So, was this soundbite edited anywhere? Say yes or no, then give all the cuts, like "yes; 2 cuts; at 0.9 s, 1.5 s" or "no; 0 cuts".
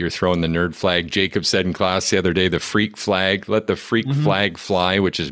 no; 0 cuts